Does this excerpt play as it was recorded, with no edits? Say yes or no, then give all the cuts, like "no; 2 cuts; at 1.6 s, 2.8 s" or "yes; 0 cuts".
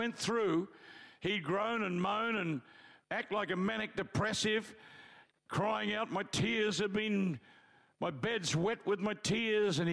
yes; 0 cuts